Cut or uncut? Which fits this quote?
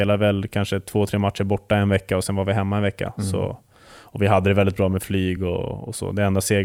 uncut